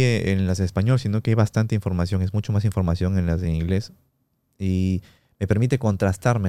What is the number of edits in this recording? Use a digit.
0